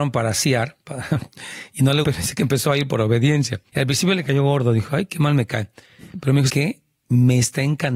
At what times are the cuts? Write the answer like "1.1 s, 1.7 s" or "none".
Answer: 2.0 s, 3.7 s, 6.5 s

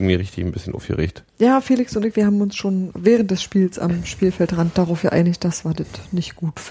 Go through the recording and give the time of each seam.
1.3 s, 2.9 s

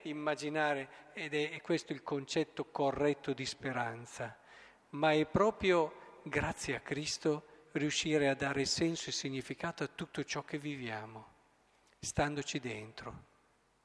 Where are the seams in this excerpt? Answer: none

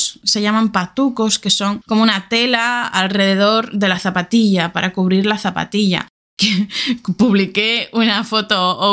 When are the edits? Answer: none

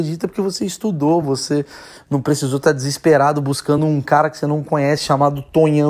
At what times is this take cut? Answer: none

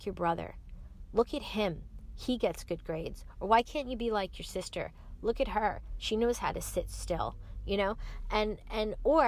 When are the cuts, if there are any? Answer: none

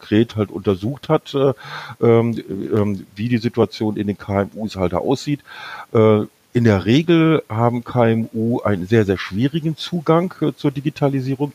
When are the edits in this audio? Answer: none

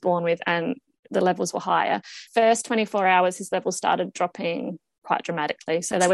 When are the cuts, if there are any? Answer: 2.3 s

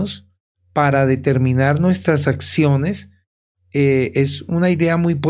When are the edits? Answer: none

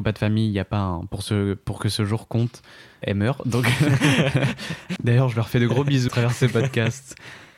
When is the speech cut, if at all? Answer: 3.0 s, 5.0 s, 6.1 s

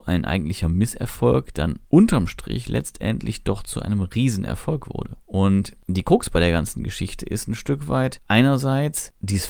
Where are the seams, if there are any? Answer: none

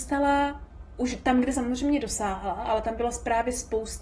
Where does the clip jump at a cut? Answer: 1.5 s

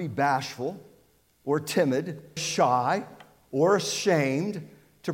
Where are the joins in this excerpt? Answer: 2.4 s

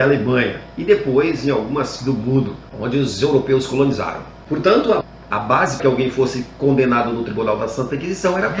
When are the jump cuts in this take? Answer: 2.0 s, 5.8 s

